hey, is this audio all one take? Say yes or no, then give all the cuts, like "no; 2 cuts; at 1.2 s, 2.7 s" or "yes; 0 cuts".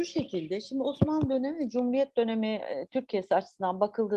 yes; 0 cuts